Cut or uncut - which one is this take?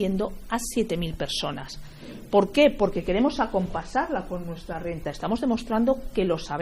uncut